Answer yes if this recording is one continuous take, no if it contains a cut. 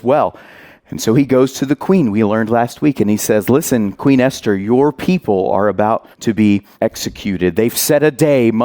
no